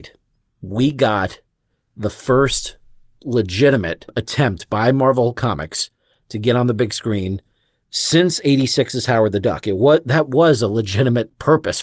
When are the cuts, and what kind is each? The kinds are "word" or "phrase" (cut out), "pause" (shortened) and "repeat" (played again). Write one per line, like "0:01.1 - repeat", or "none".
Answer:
none